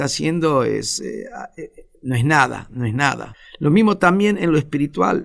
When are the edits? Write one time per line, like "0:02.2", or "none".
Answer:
none

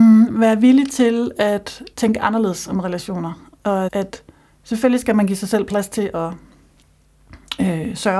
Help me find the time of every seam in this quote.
0:01.9
0:03.9

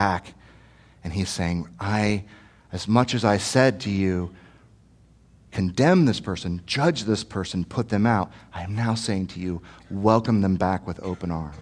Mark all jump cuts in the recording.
none

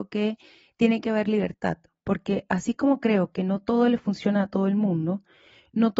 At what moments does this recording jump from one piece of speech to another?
none

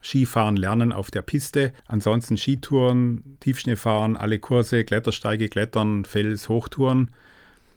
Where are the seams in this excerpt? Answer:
0:01.8

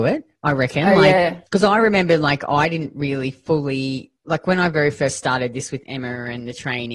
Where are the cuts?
0:01.5
0:04.2

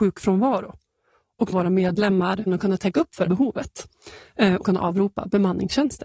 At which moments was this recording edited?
0:01.5
0:02.5
0:03.3
0:04.6

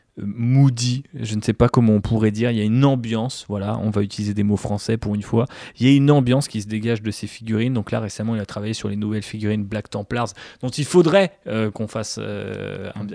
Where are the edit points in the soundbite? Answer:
none

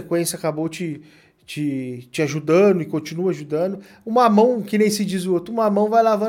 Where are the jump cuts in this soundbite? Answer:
none

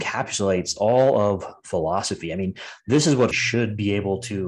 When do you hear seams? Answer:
0:03.3

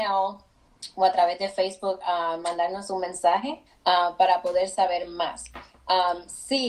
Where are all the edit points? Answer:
0:03.7

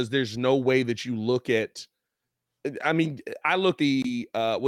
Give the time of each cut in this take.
0:03.4
0:03.8

